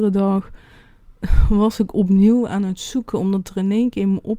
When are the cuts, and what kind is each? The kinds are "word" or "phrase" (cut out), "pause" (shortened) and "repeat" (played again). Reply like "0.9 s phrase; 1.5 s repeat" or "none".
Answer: none